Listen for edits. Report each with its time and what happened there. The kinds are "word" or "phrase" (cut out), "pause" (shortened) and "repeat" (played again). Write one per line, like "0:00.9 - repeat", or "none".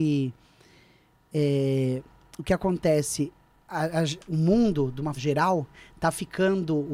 0:04.2 - word
0:05.2 - word